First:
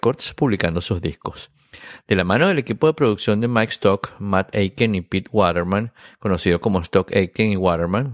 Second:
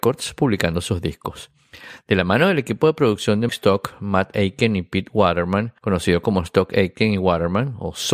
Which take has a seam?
second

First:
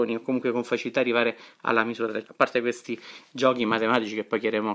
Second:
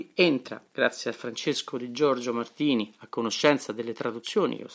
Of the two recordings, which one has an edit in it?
first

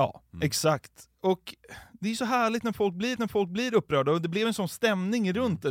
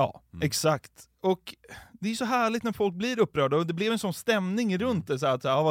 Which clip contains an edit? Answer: first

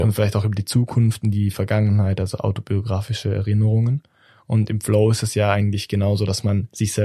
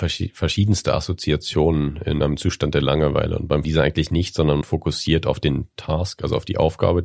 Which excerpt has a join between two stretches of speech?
second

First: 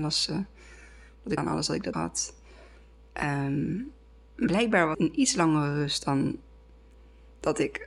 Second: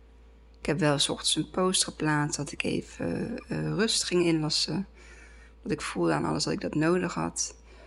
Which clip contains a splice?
first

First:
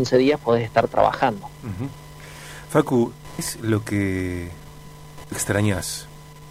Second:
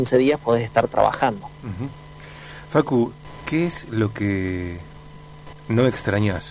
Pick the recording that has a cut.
first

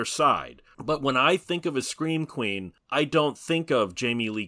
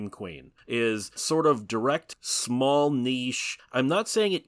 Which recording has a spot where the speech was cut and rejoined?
second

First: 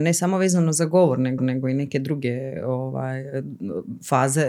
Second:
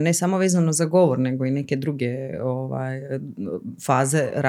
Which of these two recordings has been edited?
first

